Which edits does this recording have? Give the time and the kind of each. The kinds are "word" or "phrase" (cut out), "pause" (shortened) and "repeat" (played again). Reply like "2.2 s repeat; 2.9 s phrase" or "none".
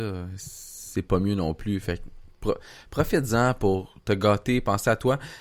none